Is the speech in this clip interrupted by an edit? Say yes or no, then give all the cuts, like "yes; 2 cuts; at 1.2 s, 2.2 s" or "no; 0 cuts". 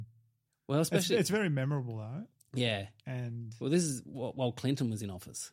no; 0 cuts